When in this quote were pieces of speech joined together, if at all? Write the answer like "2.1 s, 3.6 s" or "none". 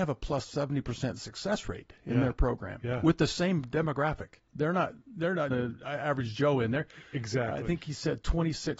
4.5 s, 5.5 s